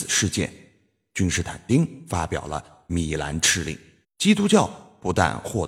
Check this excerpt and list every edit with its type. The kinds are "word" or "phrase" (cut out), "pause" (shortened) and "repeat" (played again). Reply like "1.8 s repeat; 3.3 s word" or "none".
4.0 s pause